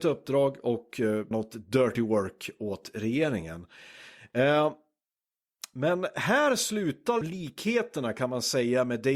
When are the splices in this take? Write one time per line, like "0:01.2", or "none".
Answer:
0:01.3
0:07.2